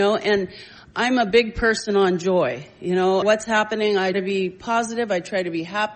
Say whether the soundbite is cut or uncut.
cut